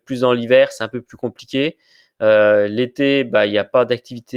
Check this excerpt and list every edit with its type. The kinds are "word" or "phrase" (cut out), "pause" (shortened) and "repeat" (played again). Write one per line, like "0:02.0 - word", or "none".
none